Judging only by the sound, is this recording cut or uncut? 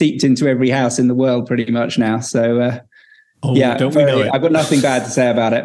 uncut